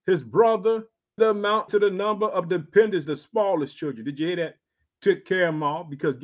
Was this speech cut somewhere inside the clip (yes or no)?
yes